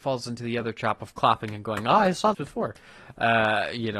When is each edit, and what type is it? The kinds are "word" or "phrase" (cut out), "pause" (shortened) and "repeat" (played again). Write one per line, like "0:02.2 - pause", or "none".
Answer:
0:02.3 - word